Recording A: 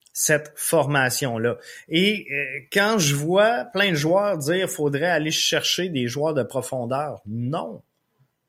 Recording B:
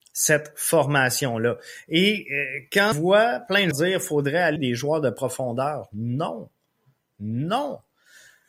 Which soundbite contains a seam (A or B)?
B